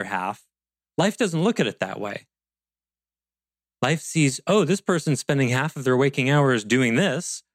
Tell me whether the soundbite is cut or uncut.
uncut